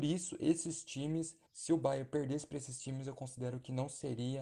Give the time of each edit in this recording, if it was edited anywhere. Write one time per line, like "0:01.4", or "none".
0:01.5